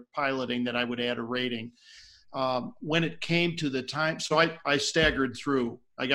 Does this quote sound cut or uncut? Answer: uncut